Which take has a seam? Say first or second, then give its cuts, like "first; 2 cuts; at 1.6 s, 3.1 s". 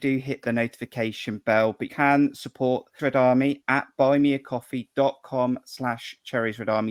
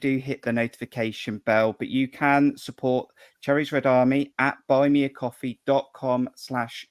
first; 2 cuts; at 1.9 s, 3.0 s